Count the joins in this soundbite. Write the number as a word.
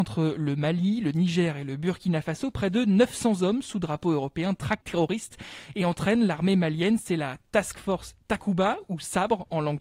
one